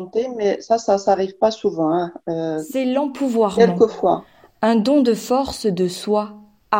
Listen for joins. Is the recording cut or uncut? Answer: uncut